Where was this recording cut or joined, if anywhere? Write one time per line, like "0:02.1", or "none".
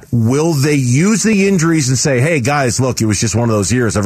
none